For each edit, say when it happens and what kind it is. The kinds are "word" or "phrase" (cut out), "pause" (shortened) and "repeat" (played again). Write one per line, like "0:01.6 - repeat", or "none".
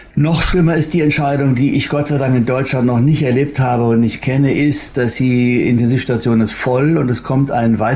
none